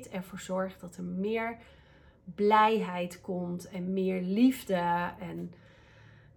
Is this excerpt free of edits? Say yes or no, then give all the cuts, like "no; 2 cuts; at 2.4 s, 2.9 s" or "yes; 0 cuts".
yes; 0 cuts